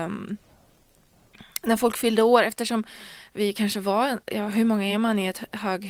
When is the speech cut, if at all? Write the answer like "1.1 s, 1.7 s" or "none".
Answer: none